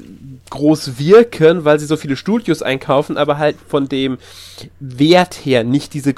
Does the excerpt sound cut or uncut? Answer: uncut